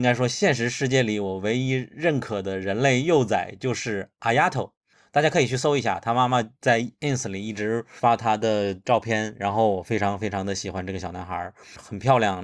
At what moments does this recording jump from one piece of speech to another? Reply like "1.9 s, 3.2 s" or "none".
none